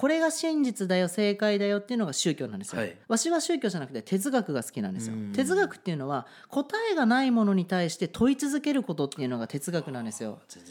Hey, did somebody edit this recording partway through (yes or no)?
yes